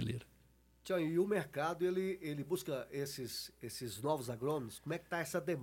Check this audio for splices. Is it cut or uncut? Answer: uncut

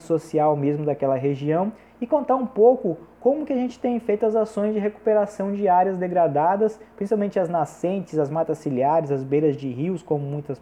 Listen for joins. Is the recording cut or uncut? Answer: uncut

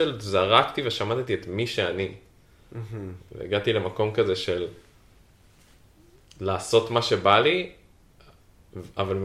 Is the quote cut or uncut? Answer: uncut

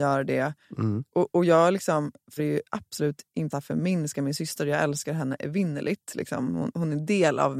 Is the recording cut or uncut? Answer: cut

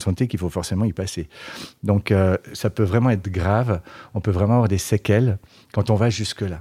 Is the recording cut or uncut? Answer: uncut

